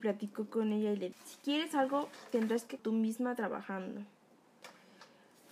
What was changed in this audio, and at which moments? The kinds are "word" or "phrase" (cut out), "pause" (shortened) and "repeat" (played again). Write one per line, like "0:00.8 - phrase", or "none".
0:01.1 - word
0:02.8 - word

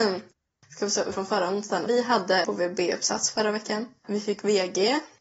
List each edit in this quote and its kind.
0:01.1 - word
0:01.9 - word
0:02.4 - word
0:04.0 - pause

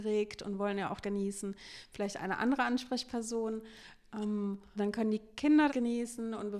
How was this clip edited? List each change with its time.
0:01.0 - phrase
0:04.8 - word
0:05.7 - word

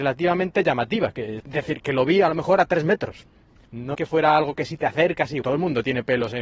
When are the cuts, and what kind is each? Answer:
0:01.4 - word
0:03.9 - word
0:05.4 - word

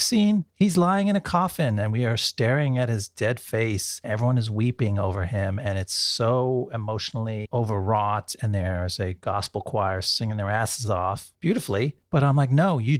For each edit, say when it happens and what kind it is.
0:04.0 - word

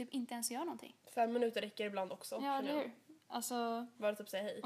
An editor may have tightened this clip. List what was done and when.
0:01.0 - pause

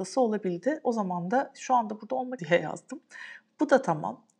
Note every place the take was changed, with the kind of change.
0:02.4 - word

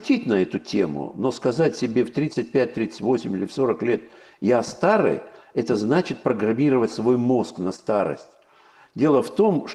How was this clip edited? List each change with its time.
none

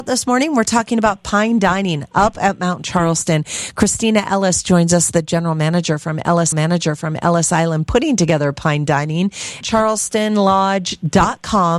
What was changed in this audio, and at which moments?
0:06.5 - repeat
0:09.6 - phrase

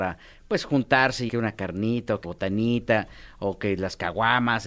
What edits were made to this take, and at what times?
0:01.3 - word
0:02.2 - word

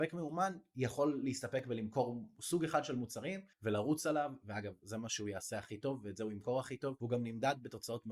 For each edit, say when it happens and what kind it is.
0:03.5 - pause

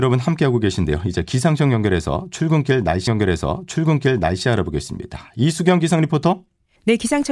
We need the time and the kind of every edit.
0:03.1 - repeat

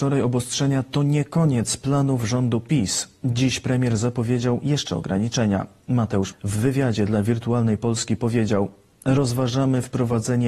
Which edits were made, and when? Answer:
0:04.9 - word
0:06.3 - word

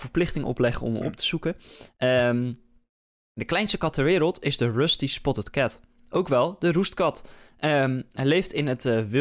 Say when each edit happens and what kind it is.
none

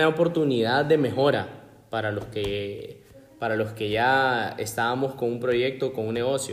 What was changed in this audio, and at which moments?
none

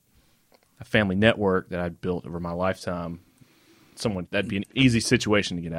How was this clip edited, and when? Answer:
0:04.3 - word
0:04.6 - word

